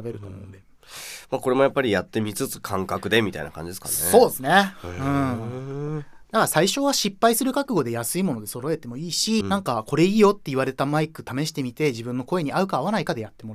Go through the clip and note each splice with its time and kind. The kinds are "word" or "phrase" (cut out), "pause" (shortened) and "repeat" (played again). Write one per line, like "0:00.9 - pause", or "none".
0:09.4 - phrase